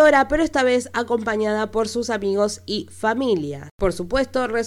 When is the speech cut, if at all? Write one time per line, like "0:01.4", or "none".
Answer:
none